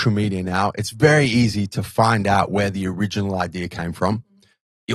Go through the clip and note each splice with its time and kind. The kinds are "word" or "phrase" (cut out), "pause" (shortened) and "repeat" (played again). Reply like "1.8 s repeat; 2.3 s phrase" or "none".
none